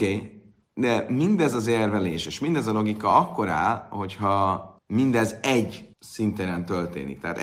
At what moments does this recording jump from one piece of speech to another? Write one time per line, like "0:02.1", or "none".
0:04.8
0:05.9